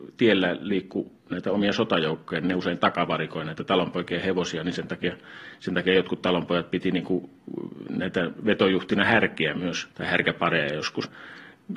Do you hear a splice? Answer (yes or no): yes